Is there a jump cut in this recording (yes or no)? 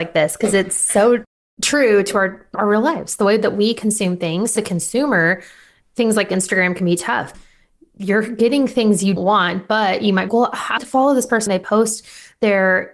yes